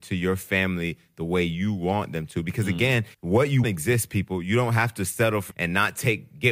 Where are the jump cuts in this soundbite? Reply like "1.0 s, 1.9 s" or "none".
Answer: 3.1 s, 3.6 s, 5.5 s